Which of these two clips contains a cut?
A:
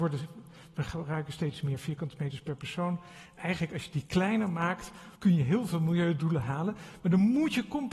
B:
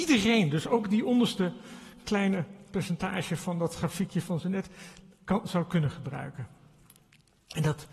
A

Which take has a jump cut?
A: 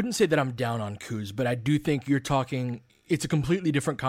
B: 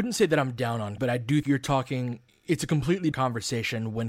B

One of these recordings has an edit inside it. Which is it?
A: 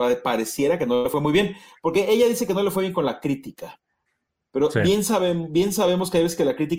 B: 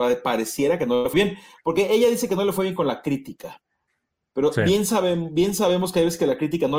B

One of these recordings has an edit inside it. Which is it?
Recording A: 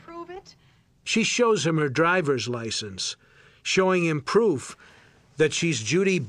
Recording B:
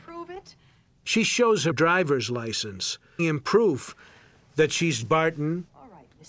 B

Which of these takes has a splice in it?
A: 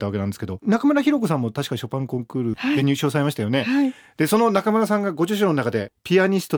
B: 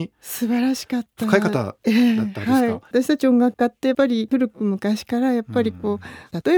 B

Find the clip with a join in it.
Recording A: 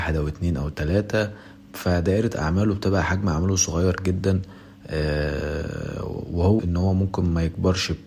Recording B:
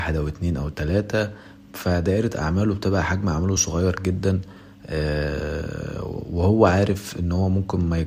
A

